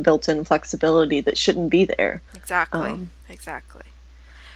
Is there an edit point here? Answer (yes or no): yes